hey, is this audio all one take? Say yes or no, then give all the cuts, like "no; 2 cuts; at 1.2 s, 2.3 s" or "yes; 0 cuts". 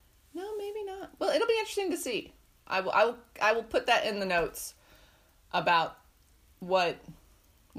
yes; 0 cuts